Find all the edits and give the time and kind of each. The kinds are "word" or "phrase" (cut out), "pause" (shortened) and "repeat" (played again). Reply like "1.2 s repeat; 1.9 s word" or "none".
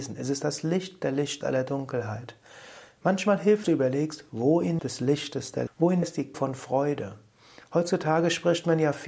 1.4 s word; 3.6 s phrase; 4.8 s phrase; 5.7 s word; 6.0 s word; 6.3 s word